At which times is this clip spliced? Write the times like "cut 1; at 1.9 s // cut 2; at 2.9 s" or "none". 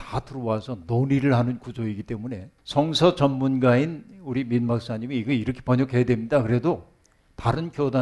cut 1; at 2.6 s